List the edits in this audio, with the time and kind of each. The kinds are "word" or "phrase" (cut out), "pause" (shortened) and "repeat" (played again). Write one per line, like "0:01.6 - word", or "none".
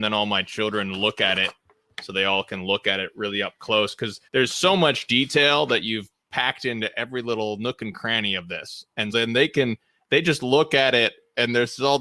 0:04.3 - pause
0:09.1 - word

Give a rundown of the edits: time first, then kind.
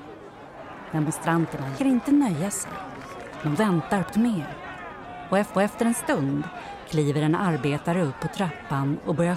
0:01.8 - phrase
0:03.6 - phrase
0:04.1 - word
0:05.5 - repeat

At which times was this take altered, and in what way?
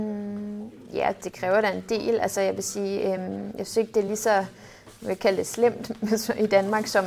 none

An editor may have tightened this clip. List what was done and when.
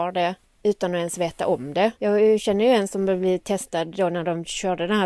0:02.0 - pause

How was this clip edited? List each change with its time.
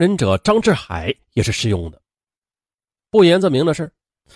none

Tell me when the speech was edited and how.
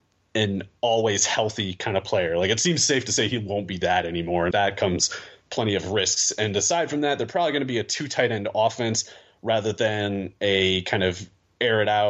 0:04.5 - word

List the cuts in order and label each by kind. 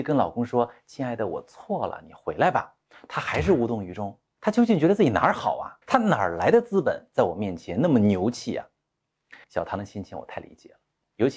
0:05.8 - pause
0:09.4 - pause

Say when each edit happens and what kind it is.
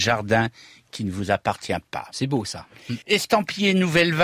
0:03.0 - pause

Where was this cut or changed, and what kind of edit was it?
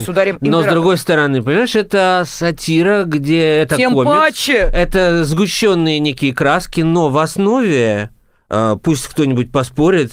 none

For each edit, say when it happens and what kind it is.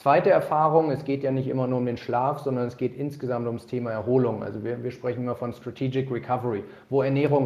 none

